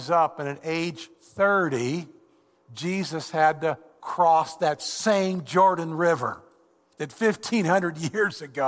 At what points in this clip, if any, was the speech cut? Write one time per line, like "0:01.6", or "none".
none